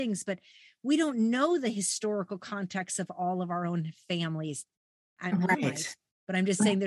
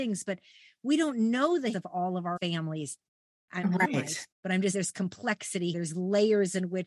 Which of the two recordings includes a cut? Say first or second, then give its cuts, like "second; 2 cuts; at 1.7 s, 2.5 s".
second; 5 cuts; at 1.7 s, 2.4 s, 4.3 s, 4.7 s, 5.7 s